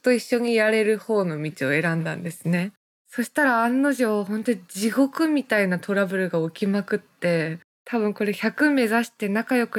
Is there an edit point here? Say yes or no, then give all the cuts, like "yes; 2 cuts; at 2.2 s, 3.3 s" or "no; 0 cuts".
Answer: no; 0 cuts